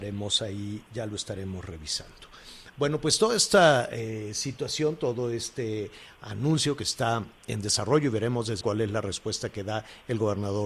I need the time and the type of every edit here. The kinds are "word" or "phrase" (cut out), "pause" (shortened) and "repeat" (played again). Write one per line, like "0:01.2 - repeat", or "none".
0:08.6 - word